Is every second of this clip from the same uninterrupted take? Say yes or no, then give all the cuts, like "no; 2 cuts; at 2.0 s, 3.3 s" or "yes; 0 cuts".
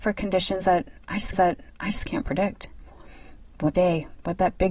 no; 2 cuts; at 1.3 s, 3.7 s